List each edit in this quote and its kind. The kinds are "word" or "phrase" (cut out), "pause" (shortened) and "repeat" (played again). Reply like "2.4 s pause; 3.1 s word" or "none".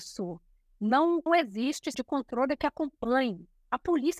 1.3 s word; 1.9 s word; 2.6 s word